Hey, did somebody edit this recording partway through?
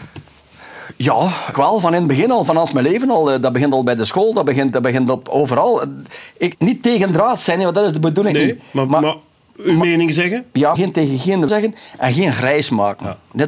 yes; 5 cuts; at 1.5 s, 2.7 s, 6.5 s, 10.8 s, 11.5 s

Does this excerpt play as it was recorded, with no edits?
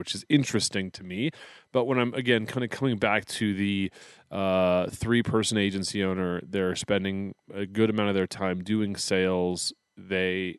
yes; 0 cuts

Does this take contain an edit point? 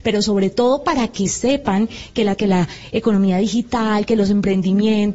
yes; 1 cut; at 2.4 s

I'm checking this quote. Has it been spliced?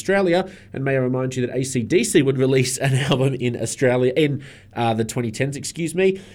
no; 0 cuts

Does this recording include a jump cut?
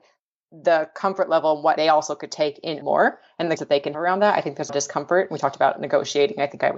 yes; 5 cuts; at 1.8 s, 2.8 s, 3.6 s, 3.9 s, 4.7 s

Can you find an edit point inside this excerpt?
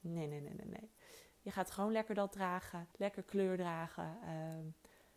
yes; 1 cut; at 2.9 s

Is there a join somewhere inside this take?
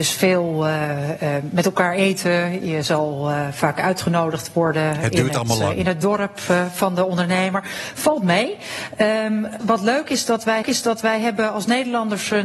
yes; 2 cuts; at 9.6 s, 10.6 s

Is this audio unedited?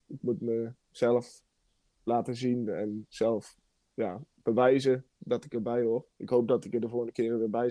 yes; 0 cuts

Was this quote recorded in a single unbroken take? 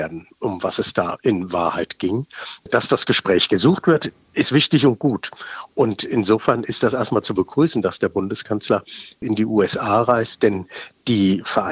yes; 0 cuts

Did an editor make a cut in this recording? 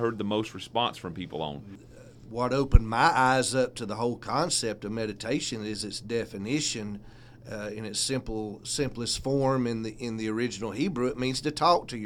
no; 0 cuts

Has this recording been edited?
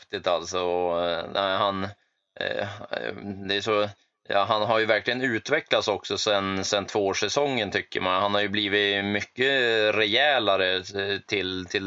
no; 0 cuts

